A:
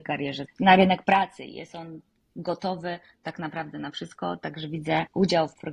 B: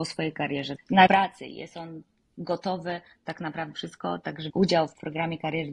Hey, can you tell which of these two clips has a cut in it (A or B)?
B